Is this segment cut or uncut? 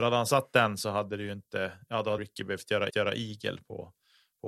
cut